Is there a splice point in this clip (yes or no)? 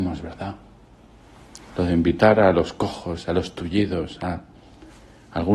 no